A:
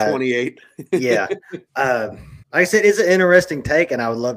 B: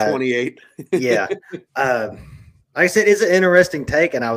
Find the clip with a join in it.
A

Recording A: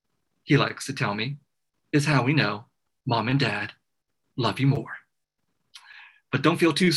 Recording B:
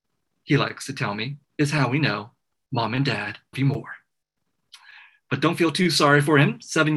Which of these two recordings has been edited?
B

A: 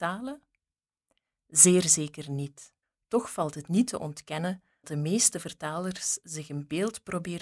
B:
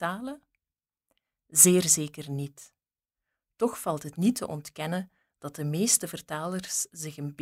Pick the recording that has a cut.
A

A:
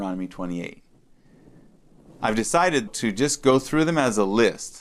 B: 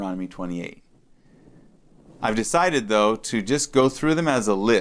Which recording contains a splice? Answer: A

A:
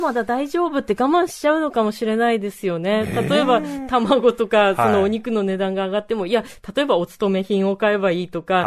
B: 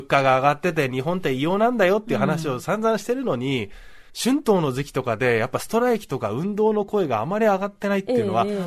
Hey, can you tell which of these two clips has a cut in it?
B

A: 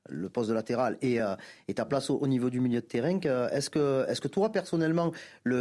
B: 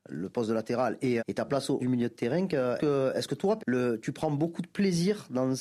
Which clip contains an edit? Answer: B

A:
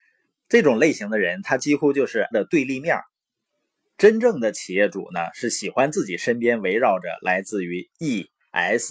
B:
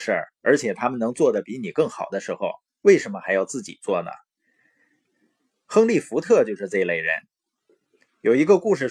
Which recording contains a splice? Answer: A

